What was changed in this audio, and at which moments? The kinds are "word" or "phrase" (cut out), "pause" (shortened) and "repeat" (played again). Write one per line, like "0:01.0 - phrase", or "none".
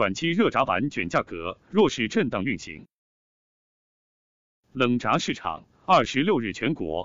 none

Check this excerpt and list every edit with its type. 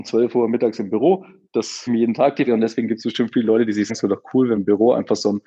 0:01.9 - word
0:02.5 - word
0:03.9 - word
0:04.6 - word

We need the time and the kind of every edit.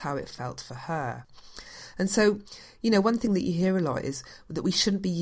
none

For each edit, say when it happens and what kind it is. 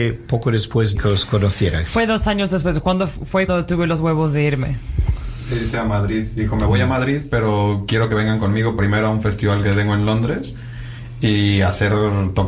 0:00.9 - phrase
0:03.5 - word

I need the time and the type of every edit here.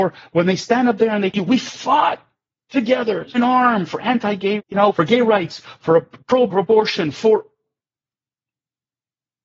0:01.3 - word
0:03.3 - word
0:04.6 - word
0:04.9 - word
0:05.8 - word
0:06.5 - word

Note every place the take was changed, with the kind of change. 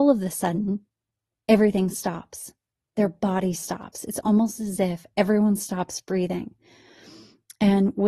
none

